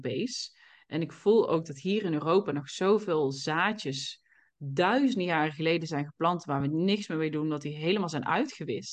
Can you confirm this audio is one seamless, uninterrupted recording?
yes; 0 cuts

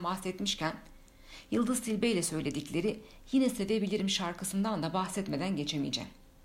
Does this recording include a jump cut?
no; 0 cuts

